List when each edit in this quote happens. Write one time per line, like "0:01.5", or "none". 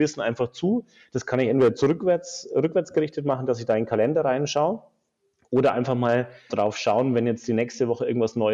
0:06.5